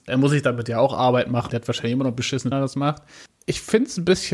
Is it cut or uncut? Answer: cut